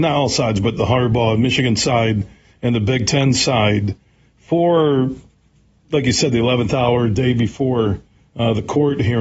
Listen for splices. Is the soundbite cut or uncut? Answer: uncut